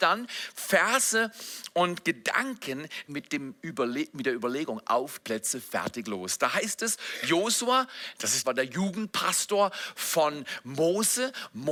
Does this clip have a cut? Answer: yes; 3 cuts; at 3.1 s, 5.2 s, 8.4 s

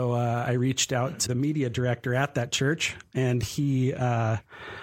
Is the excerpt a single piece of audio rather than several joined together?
no; 1 cut; at 1.3 s

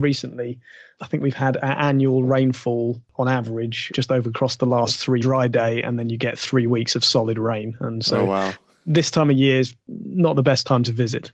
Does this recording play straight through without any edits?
no; 2 cuts; at 3.9 s, 5.2 s

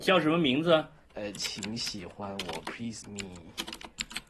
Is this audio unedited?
no; 2 cuts; at 1.0 s, 3.0 s

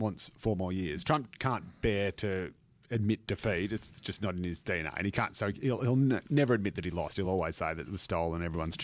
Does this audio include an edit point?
no; 0 cuts

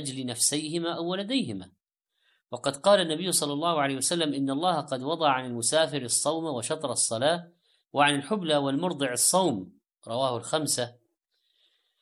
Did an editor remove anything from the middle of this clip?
no; 0 cuts

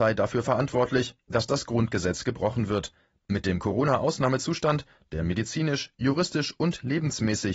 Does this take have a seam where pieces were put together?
no; 0 cuts

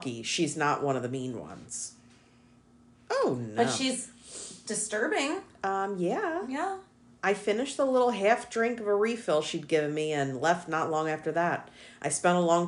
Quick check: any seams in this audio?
no; 0 cuts

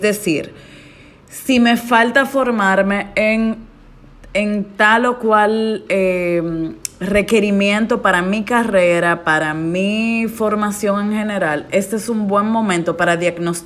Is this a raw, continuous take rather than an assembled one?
yes; 0 cuts

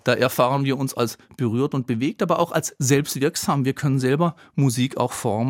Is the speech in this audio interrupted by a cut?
no; 0 cuts

